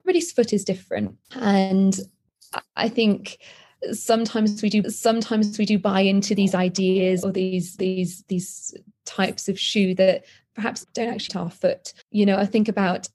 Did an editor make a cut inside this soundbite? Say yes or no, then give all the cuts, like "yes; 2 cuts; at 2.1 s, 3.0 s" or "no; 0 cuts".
yes; 8 cuts; at 1.2 s, 4.8 s, 6.4 s, 7.2 s, 7.8 s, 10.8 s, 11.3 s, 12.0 s